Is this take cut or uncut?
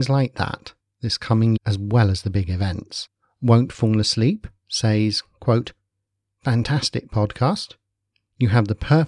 cut